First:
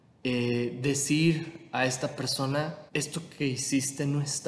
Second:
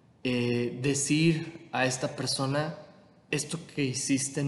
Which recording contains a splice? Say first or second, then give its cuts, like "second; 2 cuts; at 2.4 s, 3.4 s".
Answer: first; 1 cut; at 2.9 s